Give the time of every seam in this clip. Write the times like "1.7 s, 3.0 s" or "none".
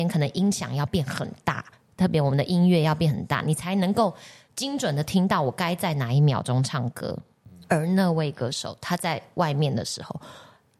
none

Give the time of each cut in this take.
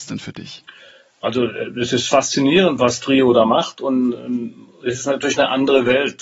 none

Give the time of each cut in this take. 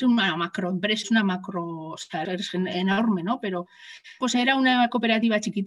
1.0 s, 2.2 s, 4.2 s

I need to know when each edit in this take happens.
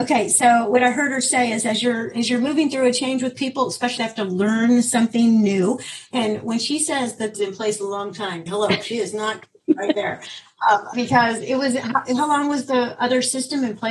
4.0 s, 7.3 s, 8.5 s, 10.9 s

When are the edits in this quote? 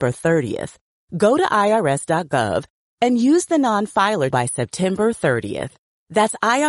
4.3 s

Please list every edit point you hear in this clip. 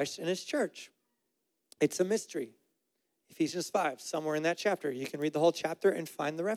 none

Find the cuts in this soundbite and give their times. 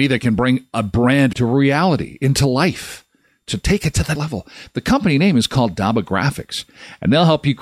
1.3 s, 4.2 s

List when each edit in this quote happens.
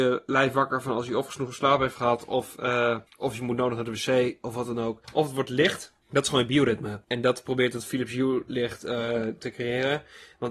3.1 s, 5.0 s, 6.0 s, 7.0 s

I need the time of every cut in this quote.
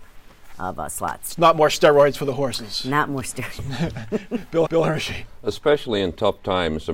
4.6 s

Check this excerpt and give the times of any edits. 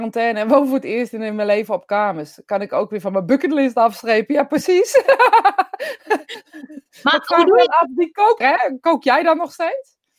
8.4 s

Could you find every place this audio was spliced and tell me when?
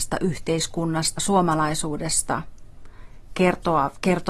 1.2 s

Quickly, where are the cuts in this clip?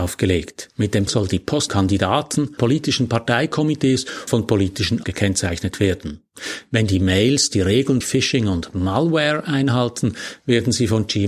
1.1 s, 1.7 s, 2.6 s, 4.3 s, 5.0 s, 8.0 s

